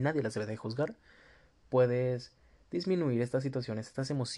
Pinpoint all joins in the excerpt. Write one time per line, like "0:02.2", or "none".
none